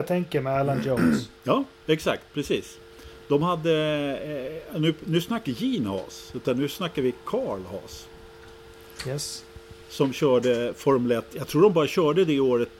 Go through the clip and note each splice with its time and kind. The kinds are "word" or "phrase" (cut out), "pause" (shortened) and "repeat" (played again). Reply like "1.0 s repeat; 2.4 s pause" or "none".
1.4 s pause; 2.3 s pause; 5.4 s phrase